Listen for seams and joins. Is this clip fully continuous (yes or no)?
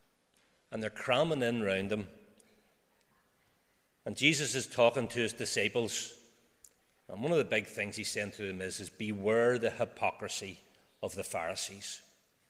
yes